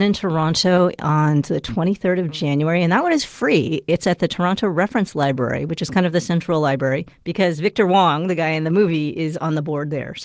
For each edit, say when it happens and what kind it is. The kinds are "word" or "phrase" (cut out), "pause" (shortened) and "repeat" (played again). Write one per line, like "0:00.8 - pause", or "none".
none